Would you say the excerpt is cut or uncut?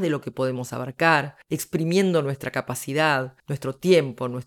cut